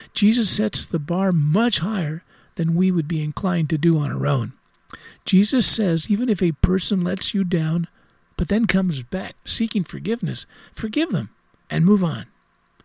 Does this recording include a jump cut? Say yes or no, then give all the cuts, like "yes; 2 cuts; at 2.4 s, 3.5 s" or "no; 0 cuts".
yes; 1 cut; at 9.4 s